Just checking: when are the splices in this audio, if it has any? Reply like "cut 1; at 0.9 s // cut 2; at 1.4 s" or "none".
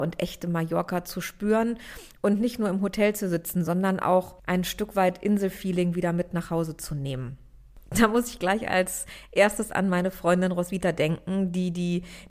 cut 1; at 4.4 s